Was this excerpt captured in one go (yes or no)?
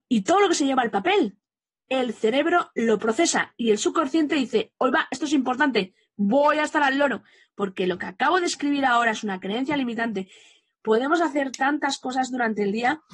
yes